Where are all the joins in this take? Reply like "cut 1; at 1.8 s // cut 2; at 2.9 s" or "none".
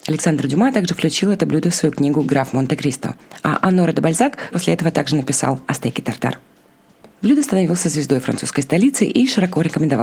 cut 1; at 4.5 s